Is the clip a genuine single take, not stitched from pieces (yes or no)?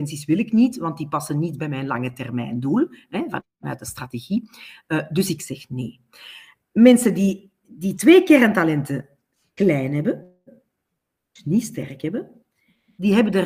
yes